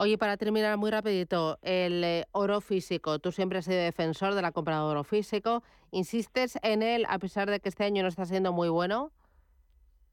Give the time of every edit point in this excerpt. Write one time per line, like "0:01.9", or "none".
none